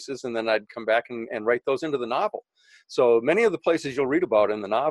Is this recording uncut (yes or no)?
yes